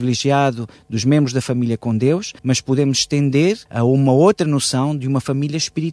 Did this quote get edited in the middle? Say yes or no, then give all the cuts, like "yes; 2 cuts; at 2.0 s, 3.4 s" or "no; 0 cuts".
yes; 2 cuts; at 2.4 s, 3.7 s